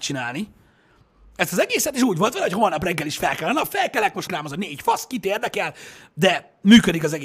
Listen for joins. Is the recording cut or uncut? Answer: cut